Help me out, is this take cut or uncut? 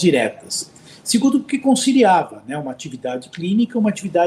uncut